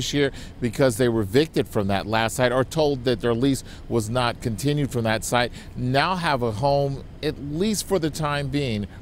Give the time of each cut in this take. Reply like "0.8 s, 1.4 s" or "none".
none